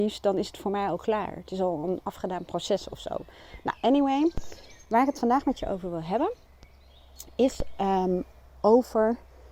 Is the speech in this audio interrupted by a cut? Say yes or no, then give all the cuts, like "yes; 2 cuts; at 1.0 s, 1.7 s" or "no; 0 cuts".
no; 0 cuts